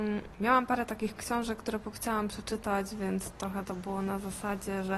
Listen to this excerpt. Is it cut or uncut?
cut